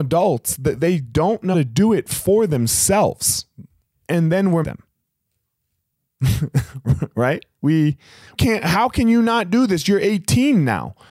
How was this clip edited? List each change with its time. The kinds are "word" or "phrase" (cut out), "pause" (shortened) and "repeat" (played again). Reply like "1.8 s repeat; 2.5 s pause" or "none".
1.5 s word; 3.9 s pause; 4.6 s phrase; 7.6 s word; 8.3 s phrase